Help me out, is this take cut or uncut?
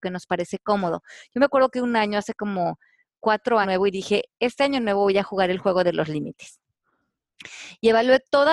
cut